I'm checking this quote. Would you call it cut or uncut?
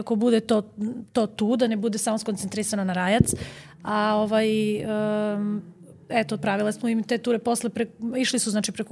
uncut